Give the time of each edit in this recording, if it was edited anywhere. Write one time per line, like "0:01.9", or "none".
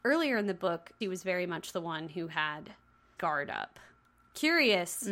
0:01.0
0:03.2